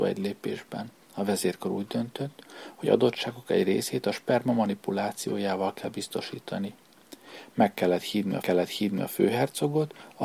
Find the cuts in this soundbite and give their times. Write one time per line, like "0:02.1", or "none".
0:01.0
0:02.9
0:08.4